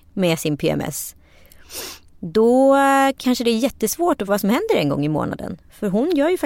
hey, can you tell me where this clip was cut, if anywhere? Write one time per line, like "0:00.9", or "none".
0:04.3